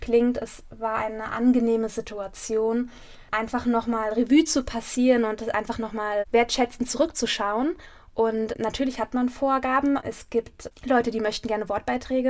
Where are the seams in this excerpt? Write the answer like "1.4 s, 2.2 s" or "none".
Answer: none